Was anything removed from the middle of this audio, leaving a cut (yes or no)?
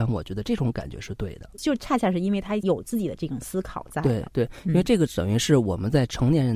yes